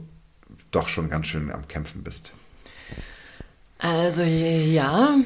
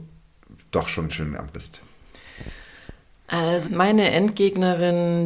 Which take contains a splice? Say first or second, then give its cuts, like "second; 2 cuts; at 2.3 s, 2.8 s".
second; 3 cuts; at 1.1 s, 1.5 s, 3.6 s